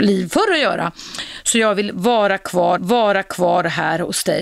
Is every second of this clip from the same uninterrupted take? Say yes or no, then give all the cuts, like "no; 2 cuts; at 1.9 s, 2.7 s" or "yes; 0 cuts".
no; 1 cut; at 2.8 s